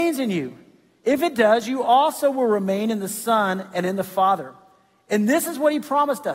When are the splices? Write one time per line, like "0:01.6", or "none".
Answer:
none